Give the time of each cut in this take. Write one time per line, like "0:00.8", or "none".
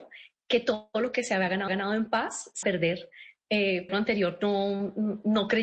0:01.7
0:02.6
0:03.9